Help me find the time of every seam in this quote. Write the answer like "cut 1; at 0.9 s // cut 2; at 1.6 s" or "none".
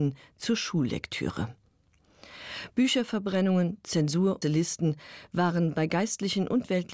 cut 1; at 4.4 s